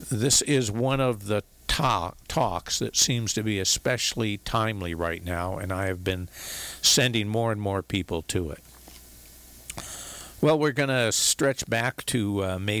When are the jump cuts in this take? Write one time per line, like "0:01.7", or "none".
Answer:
none